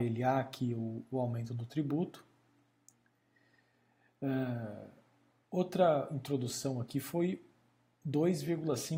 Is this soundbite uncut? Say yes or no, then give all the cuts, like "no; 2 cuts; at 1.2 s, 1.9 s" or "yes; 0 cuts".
yes; 0 cuts